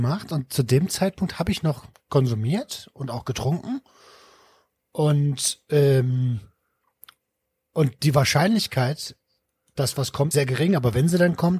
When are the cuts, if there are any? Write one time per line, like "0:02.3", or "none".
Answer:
0:01.9
0:10.3